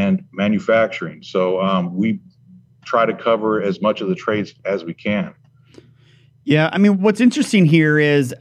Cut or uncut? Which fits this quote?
uncut